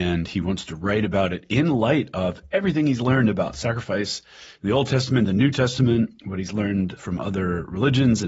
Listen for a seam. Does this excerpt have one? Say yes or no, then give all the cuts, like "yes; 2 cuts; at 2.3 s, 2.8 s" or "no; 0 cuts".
yes; 2 cuts; at 6.2 s, 7.0 s